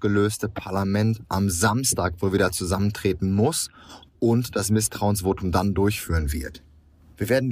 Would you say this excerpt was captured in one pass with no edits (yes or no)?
yes